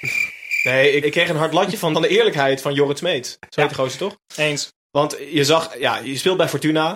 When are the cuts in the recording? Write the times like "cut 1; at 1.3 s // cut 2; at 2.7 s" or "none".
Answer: cut 1; at 1.0 s // cut 2; at 1.9 s